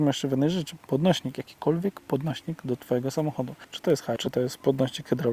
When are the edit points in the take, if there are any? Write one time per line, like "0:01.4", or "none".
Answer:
0:03.6
0:04.2